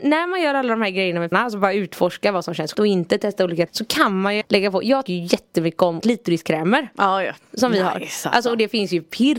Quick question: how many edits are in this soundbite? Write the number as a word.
six